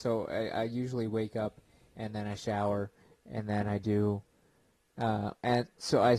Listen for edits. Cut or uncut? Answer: uncut